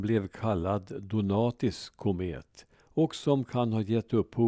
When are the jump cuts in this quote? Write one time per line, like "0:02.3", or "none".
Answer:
0:02.7